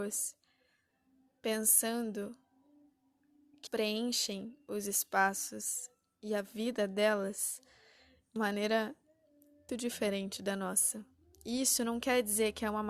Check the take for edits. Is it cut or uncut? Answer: cut